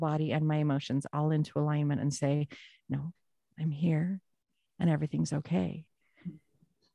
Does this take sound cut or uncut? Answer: uncut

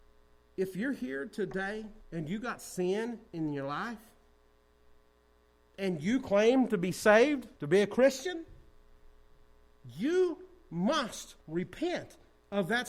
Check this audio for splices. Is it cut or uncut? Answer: cut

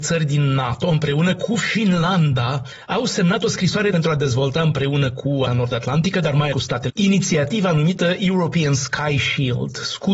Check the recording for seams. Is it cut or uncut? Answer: cut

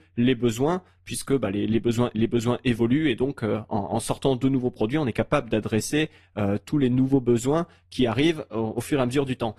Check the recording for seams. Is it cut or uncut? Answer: cut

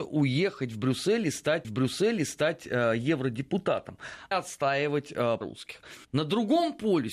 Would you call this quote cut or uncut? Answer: cut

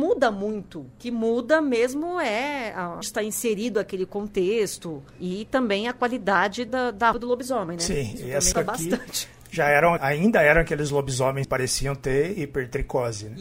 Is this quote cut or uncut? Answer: cut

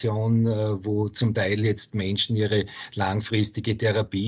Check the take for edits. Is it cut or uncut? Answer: uncut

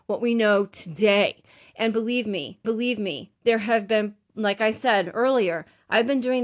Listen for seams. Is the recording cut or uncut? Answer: cut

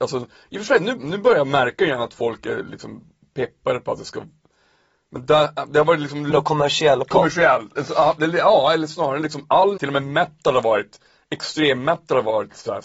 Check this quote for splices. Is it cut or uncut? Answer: cut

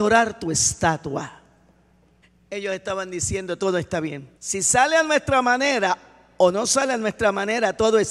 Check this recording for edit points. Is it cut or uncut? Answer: cut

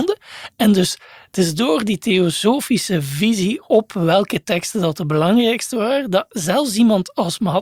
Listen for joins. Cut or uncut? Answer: uncut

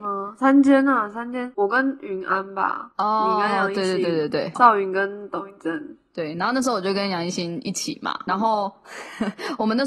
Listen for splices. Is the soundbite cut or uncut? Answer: cut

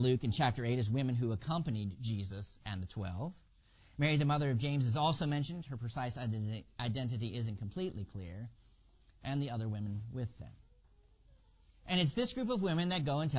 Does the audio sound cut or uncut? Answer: uncut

